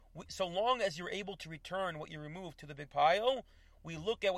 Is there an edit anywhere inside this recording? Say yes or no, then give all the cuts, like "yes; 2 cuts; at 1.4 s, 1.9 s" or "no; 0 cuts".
no; 0 cuts